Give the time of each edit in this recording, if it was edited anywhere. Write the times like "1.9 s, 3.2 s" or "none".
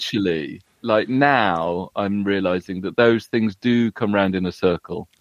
none